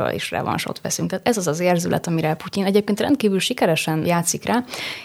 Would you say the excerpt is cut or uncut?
uncut